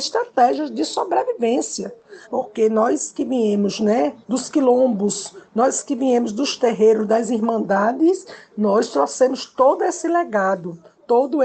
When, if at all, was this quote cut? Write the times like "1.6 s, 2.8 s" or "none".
2.2 s, 4.2 s